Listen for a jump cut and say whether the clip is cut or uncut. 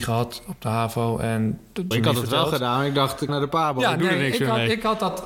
cut